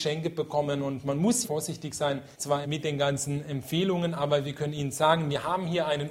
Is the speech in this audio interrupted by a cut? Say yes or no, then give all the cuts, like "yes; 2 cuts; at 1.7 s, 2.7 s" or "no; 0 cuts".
yes; 3 cuts; at 1.4 s, 2.3 s, 2.6 s